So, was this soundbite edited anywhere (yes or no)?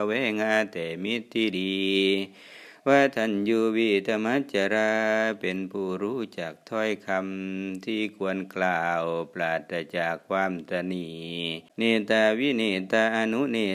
yes